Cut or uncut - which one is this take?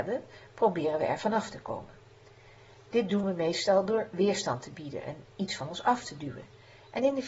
uncut